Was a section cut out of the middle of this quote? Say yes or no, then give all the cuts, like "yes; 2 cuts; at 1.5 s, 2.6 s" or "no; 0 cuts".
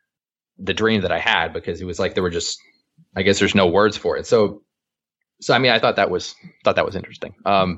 no; 0 cuts